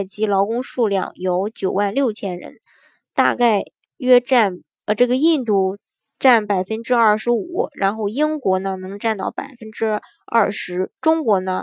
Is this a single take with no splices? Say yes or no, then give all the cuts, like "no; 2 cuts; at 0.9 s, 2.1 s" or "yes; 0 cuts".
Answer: yes; 0 cuts